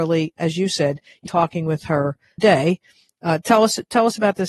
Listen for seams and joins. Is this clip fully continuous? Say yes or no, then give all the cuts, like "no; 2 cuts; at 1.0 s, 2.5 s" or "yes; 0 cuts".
no; 2 cuts; at 1.3 s, 2.4 s